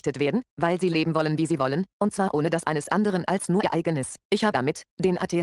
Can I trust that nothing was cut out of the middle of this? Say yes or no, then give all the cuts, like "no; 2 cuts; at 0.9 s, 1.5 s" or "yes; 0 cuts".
no; 2 cuts; at 2.6 s, 4.5 s